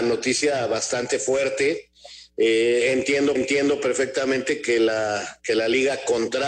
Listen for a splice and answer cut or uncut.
cut